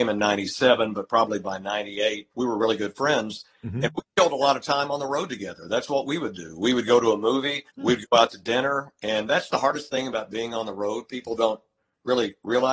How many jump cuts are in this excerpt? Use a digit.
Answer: 2